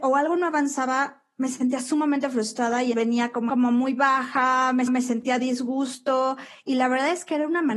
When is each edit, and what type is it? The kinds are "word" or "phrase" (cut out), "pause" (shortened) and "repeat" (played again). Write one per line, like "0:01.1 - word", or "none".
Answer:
0:02.9 - word
0:03.5 - phrase
0:04.9 - repeat